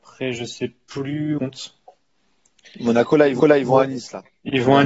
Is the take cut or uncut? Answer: cut